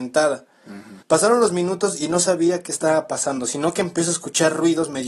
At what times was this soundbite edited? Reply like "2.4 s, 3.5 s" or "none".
1.0 s